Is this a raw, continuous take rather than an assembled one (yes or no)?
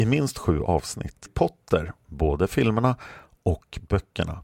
no